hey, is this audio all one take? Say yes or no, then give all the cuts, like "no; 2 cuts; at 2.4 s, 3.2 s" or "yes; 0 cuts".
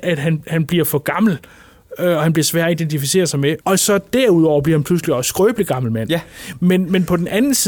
no; 1 cut; at 3.6 s